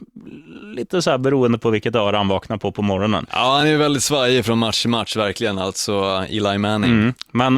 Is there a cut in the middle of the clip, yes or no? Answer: no